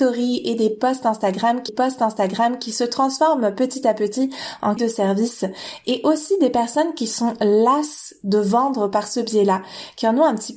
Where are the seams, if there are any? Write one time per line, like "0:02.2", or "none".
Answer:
0:01.7
0:04.8